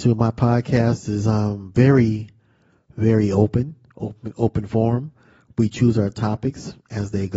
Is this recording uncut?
yes; 0 cuts

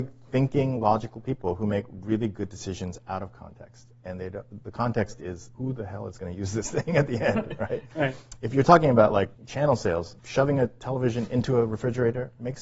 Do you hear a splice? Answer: yes; 3 cuts; at 5.5 s, 9.3 s, 10.2 s

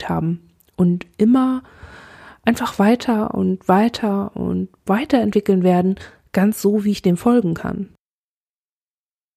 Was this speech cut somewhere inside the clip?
no; 0 cuts

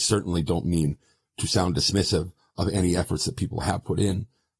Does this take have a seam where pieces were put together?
no; 0 cuts

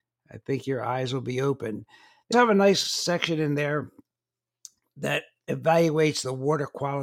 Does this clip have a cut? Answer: yes; 1 cut; at 2.3 s

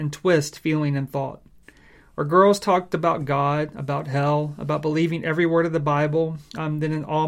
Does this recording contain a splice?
no; 0 cuts

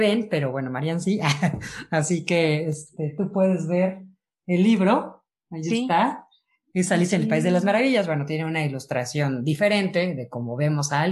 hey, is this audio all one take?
yes; 0 cuts

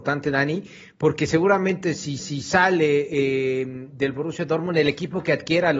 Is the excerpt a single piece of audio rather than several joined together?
no; 1 cut; at 2.2 s

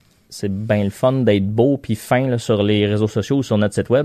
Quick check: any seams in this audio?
no; 0 cuts

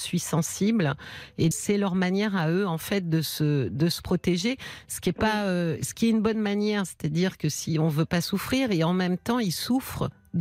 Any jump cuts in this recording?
yes; 1 cut; at 1.5 s

